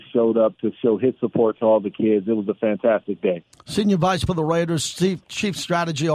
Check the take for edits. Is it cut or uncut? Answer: cut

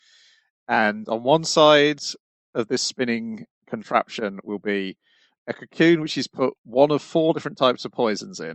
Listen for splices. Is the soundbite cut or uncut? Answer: cut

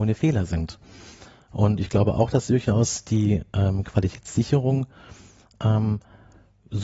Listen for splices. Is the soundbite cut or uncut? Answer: uncut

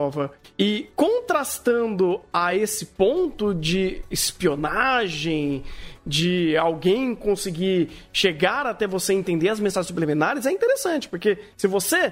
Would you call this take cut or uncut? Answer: uncut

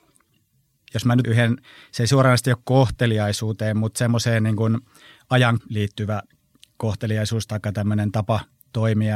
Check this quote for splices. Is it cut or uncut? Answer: cut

